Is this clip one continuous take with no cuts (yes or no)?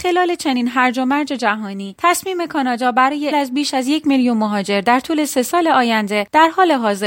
no